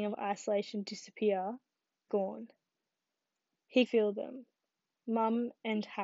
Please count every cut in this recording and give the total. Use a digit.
2